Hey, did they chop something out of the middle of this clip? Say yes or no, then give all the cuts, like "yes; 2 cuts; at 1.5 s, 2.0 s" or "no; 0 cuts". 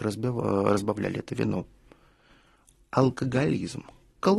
no; 0 cuts